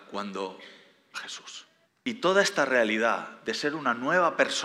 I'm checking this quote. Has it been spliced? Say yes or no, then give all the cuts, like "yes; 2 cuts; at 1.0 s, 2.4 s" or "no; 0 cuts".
yes; 2 cuts; at 1.1 s, 1.8 s